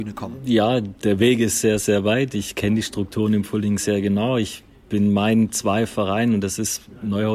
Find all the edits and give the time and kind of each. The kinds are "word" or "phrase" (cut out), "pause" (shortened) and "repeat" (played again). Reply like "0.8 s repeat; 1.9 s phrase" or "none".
1.0 s pause